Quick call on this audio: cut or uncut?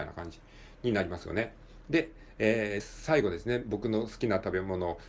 cut